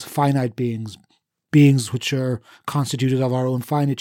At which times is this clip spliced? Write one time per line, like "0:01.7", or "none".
none